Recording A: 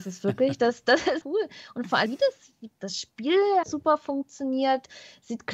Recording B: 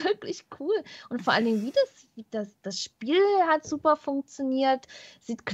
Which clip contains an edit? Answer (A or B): A